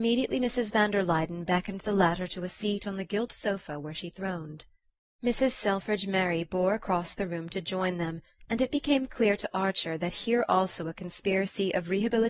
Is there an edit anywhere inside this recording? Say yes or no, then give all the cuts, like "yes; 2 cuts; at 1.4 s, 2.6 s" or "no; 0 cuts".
no; 0 cuts